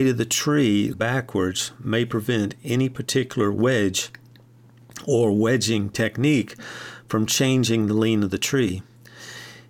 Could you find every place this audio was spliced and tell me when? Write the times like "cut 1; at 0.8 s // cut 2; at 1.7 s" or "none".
cut 1; at 0.9 s

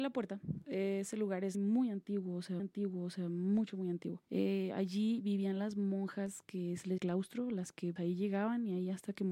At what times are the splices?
cut 1; at 1.5 s // cut 2; at 2.6 s // cut 3; at 4.2 s // cut 4; at 7.0 s // cut 5; at 8.0 s

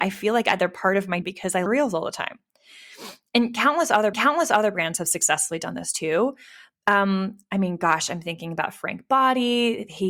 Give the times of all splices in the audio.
cut 1; at 1.2 s // cut 2; at 1.7 s // cut 3; at 4.1 s

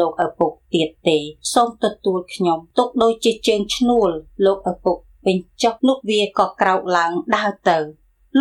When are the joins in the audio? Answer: cut 1; at 5.8 s

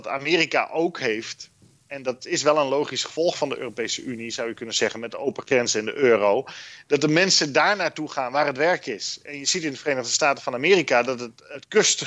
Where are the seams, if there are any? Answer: none

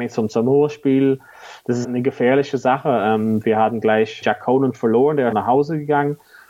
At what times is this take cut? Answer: cut 1; at 1.8 s // cut 2; at 4.2 s // cut 3; at 5.3 s

